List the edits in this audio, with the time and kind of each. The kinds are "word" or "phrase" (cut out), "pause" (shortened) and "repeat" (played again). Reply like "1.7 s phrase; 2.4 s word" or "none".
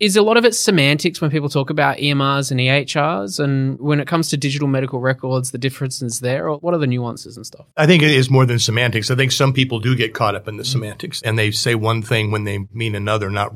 7.7 s pause